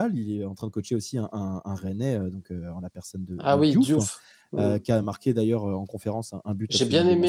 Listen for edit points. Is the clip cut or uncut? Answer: uncut